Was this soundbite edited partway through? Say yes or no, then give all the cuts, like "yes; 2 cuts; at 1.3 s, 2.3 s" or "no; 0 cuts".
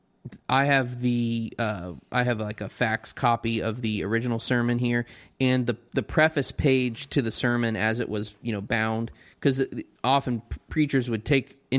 no; 0 cuts